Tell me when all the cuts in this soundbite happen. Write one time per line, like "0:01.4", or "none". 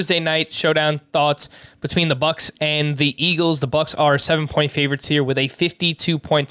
none